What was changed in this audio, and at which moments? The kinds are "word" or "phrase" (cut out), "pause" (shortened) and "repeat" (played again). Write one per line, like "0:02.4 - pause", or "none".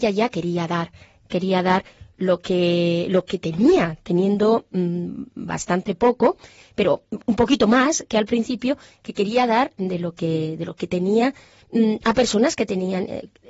none